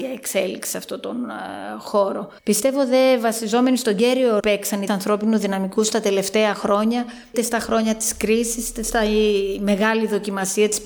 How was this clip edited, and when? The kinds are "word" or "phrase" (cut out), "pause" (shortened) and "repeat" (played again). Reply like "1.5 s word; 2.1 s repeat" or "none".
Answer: 2.4 s pause; 4.4 s phrase; 4.9 s word; 7.3 s word